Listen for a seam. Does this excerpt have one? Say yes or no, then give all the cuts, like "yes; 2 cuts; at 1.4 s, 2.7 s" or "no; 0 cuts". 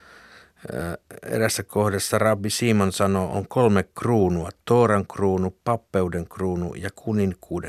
no; 0 cuts